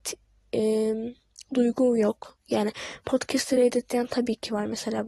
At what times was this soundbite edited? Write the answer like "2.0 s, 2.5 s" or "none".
none